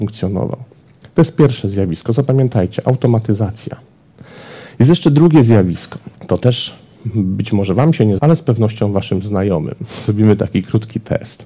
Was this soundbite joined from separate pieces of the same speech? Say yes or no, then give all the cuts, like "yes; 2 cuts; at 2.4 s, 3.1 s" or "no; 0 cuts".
yes; 2 cuts; at 6.2 s, 8.2 s